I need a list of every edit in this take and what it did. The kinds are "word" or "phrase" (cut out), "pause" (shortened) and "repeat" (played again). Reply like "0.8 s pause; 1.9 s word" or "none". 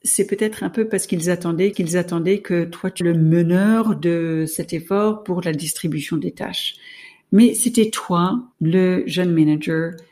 1.7 s repeat; 3.0 s word; 8.5 s pause